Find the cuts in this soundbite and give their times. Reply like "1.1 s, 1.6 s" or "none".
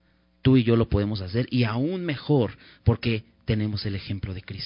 none

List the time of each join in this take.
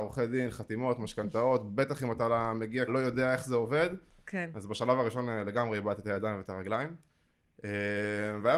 2.9 s

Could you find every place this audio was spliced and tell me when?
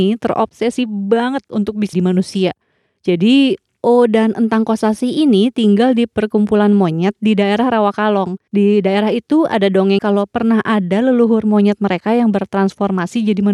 1.9 s, 8.5 s, 10.0 s

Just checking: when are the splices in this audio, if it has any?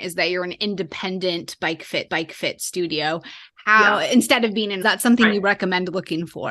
2.1 s, 4.8 s

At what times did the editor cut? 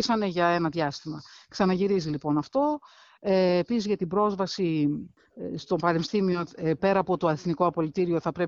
none

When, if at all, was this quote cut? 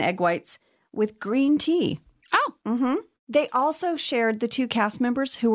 none

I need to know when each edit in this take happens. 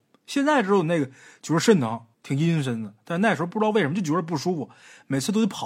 2.1 s

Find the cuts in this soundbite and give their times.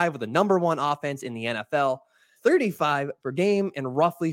2.4 s, 3.2 s

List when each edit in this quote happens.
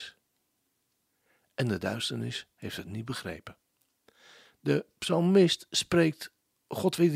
none

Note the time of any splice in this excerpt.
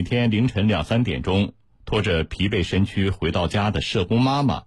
1.7 s

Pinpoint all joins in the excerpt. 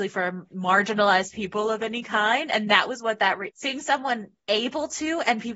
3.5 s

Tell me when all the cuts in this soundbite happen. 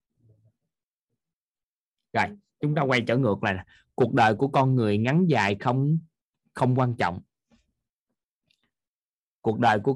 none

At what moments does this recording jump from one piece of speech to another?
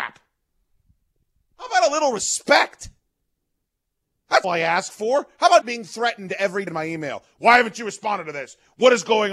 4.4 s, 5.6 s, 6.7 s

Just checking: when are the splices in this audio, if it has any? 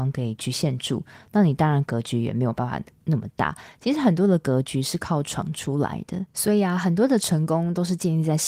6.3 s

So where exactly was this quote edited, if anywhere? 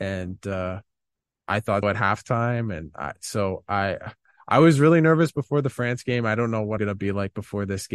1.8 s, 6.8 s

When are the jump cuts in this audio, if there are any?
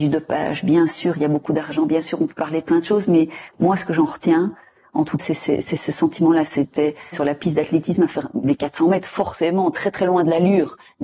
5.2 s, 7.1 s

